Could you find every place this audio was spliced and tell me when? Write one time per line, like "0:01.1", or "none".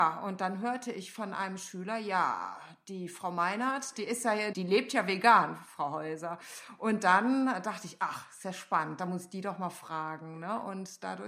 0:04.5